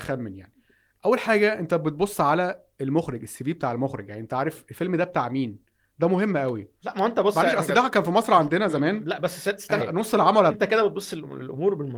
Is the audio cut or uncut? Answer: cut